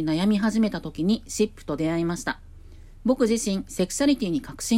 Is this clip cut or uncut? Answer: uncut